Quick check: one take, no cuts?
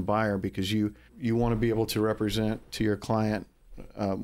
no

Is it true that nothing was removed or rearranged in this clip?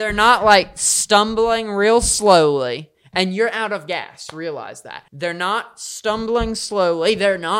no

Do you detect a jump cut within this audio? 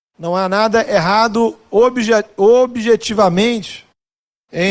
no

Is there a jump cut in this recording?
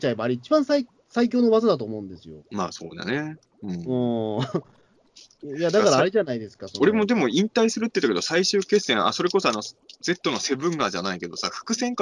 yes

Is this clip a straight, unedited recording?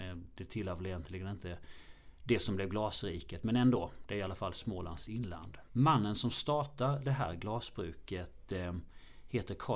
yes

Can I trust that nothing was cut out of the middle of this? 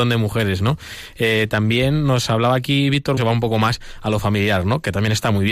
no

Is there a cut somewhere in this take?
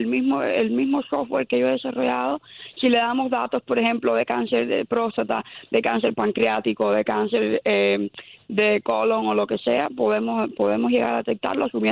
no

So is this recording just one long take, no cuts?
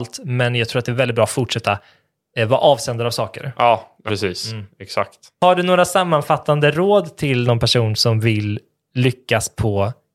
no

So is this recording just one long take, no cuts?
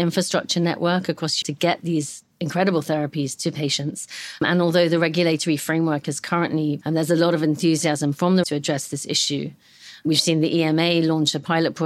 no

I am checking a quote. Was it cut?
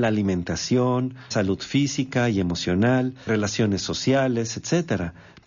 yes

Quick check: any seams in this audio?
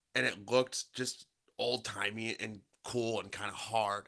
no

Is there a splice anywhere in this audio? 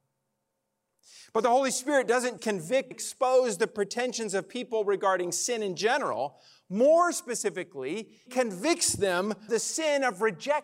yes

